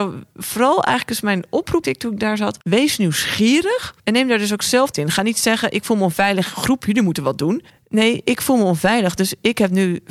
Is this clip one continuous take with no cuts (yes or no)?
no